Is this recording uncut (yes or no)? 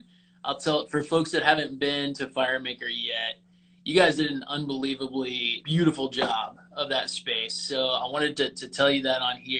no